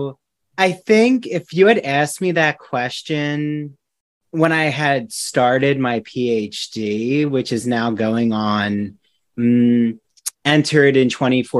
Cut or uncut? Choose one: uncut